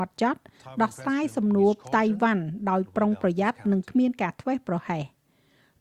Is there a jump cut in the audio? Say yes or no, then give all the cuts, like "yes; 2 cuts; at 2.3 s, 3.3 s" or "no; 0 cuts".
no; 0 cuts